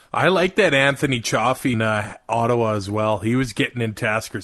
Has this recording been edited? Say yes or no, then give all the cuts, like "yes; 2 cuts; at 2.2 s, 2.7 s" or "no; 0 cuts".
yes; 1 cut; at 1.7 s